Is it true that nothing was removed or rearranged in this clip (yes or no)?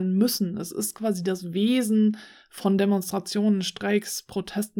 yes